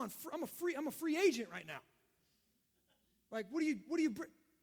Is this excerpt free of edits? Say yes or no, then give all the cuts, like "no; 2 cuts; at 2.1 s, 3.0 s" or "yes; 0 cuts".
yes; 0 cuts